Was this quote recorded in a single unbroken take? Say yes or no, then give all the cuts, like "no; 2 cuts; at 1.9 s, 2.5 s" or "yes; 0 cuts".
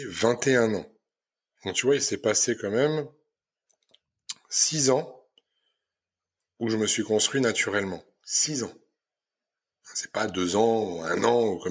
yes; 0 cuts